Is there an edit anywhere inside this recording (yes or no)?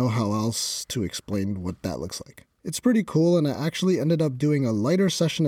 yes